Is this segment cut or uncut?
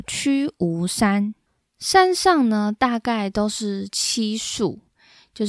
uncut